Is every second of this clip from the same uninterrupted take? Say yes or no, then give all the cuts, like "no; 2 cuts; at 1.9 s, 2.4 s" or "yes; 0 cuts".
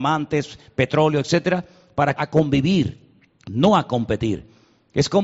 no; 1 cut; at 2.2 s